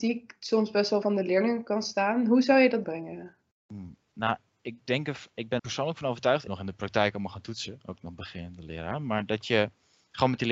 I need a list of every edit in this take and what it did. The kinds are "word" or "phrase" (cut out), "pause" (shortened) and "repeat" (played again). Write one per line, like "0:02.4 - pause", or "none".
0:01.0 - word
0:02.8 - phrase
0:03.5 - pause
0:05.6 - word
0:06.5 - phrase